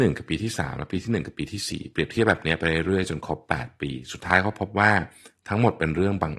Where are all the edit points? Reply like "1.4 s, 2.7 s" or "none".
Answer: none